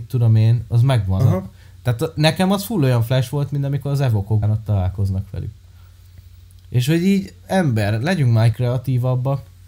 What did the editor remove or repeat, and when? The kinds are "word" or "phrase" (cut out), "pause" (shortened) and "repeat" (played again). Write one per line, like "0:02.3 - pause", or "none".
0:01.2 - word
0:04.4 - word
0:08.5 - word